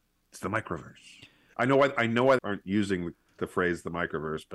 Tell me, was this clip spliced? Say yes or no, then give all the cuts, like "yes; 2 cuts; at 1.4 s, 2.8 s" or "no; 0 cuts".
yes; 2 cuts; at 1.5 s, 2.4 s